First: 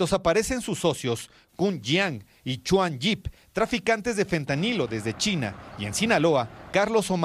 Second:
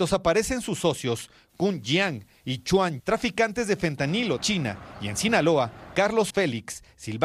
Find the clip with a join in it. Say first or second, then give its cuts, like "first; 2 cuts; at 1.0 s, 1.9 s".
second; 3 cuts; at 3.0 s, 4.4 s, 6.3 s